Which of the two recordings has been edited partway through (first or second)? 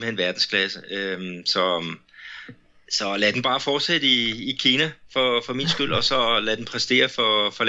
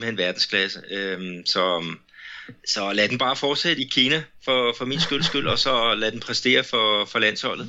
second